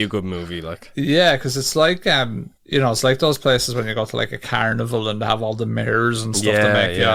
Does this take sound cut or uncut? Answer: cut